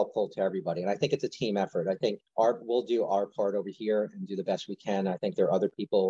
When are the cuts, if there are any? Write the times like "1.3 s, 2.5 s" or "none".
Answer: 2.3 s